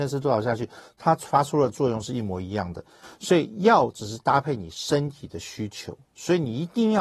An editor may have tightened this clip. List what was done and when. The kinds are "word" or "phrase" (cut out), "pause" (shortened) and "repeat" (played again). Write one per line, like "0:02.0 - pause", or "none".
none